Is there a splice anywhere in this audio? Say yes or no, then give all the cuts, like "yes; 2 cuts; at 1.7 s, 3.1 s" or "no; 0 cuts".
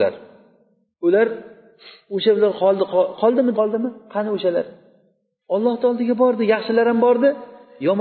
yes; 1 cut; at 3.5 s